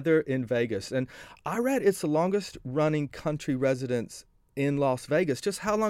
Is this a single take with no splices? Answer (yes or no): yes